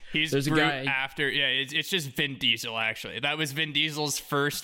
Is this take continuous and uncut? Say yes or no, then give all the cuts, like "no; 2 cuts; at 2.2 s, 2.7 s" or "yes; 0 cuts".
yes; 0 cuts